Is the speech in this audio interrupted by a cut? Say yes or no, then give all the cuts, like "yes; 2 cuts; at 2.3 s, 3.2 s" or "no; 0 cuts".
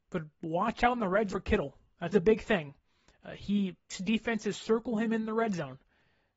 yes; 3 cuts; at 1.3 s, 2.1 s, 3.9 s